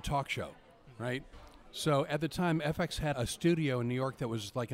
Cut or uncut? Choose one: cut